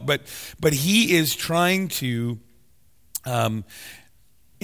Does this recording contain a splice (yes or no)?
no